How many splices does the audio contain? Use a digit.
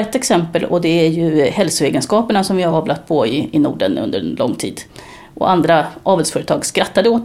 0